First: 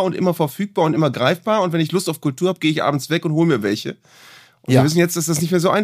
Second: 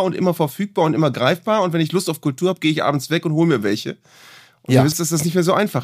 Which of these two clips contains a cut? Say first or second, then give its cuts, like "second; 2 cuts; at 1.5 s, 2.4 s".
second; 1 cut; at 4.9 s